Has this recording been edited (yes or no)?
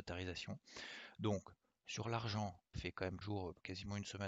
yes